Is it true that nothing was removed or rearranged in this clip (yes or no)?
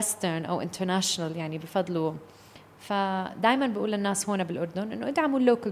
yes